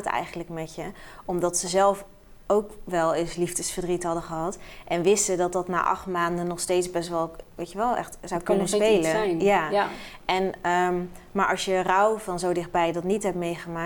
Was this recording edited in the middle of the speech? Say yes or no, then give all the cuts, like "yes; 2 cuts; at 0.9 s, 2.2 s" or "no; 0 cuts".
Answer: no; 0 cuts